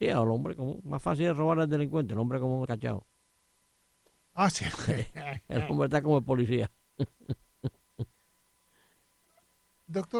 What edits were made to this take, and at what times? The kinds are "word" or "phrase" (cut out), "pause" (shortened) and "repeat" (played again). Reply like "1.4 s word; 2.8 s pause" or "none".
2.7 s word